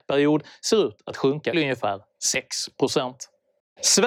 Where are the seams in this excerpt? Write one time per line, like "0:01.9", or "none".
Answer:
0:01.5